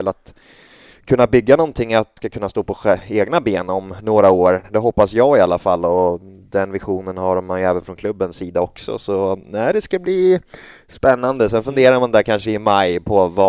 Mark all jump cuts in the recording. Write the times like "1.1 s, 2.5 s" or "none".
2.2 s